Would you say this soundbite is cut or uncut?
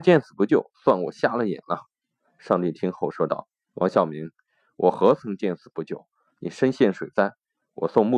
uncut